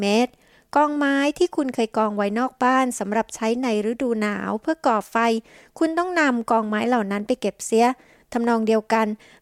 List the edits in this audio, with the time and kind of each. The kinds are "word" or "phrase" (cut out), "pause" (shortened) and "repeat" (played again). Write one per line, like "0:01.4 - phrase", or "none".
none